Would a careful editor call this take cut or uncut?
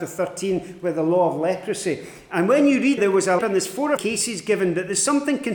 cut